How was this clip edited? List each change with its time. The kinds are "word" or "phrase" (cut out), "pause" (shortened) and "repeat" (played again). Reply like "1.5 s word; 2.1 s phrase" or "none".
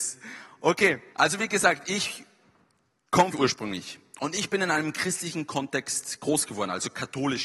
1.1 s pause; 3.3 s phrase